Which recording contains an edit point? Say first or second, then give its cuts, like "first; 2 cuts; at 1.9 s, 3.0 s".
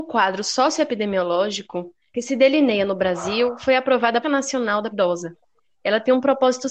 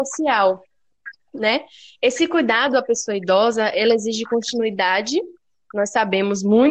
first; 3 cuts; at 2.1 s, 4.2 s, 4.9 s